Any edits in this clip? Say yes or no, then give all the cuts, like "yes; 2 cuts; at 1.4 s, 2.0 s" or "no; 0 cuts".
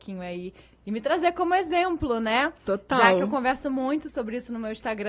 no; 0 cuts